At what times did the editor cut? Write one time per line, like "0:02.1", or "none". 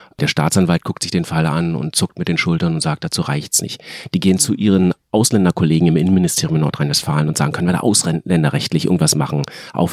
none